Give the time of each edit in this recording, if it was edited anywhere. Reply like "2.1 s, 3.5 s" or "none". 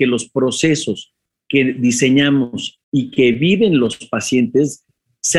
2.8 s

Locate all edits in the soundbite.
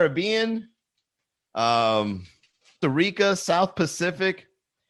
2.8 s

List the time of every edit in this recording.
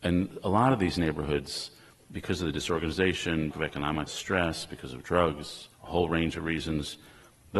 3.5 s, 4.1 s, 5.7 s

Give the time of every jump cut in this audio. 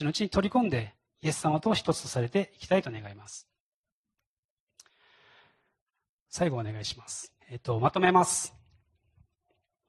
7.4 s

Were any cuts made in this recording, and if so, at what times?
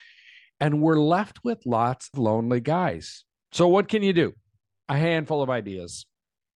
2.1 s

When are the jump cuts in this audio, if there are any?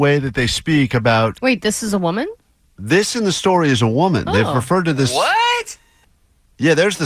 none

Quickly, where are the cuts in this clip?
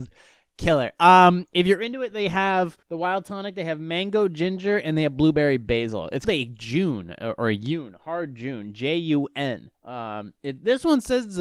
2.8 s, 6.2 s, 9.7 s

